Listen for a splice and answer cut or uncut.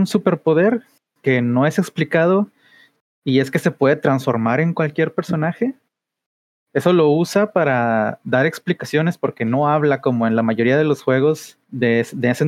uncut